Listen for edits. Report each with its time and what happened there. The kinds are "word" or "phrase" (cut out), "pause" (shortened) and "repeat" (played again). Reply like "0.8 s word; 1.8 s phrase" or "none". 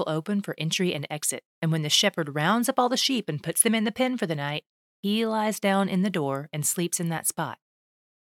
none